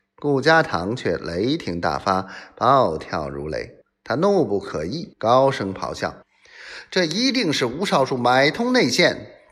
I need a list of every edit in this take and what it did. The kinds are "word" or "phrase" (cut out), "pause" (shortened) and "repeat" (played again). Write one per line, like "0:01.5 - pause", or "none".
0:03.8 - pause
0:05.1 - pause
0:06.2 - pause